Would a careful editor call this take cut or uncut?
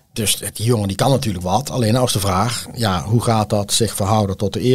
cut